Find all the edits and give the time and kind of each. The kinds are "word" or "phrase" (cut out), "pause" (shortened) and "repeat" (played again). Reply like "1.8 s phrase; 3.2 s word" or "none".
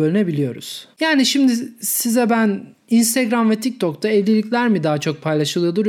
0.9 s pause